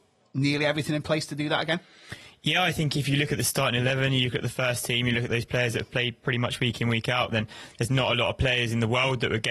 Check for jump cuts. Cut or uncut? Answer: uncut